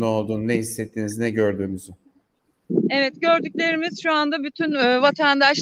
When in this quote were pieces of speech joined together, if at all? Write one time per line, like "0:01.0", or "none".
none